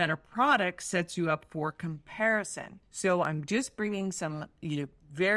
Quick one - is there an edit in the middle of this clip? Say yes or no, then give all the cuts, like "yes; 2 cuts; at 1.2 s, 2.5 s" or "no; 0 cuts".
yes; 1 cut; at 2.8 s